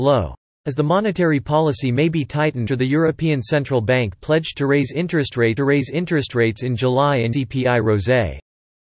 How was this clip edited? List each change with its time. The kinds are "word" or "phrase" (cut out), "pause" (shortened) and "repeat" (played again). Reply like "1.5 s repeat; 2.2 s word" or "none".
2.7 s word; 5.6 s repeat; 7.3 s word